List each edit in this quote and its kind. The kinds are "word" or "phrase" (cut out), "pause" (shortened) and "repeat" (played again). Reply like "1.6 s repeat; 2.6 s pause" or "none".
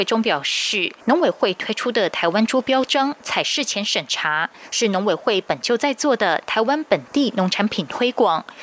1.0 s pause